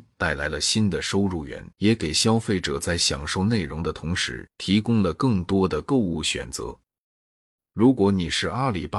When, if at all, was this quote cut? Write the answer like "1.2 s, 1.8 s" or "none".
1.7 s, 4.5 s